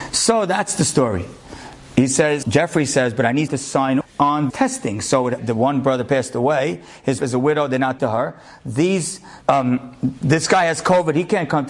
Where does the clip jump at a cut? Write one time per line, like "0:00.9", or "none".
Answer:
0:02.4
0:03.5
0:04.0
0:04.5
0:05.4
0:07.2
0:08.0
0:09.4